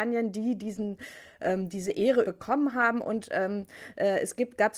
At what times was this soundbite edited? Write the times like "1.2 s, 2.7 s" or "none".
2.2 s